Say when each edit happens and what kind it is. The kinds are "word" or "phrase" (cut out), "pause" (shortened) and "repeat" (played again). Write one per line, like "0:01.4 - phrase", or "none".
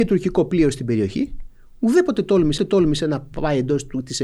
0:02.6 - repeat